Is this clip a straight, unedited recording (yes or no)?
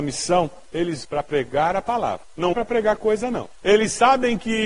no